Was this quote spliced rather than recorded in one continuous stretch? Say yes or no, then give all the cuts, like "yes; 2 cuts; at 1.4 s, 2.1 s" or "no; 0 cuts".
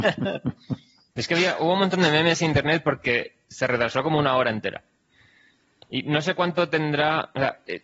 no; 0 cuts